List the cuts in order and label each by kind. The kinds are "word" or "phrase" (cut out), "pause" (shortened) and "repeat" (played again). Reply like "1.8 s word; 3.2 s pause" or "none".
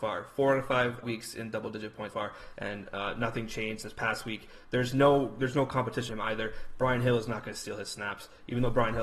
1.0 s word; 2.1 s word; 6.1 s word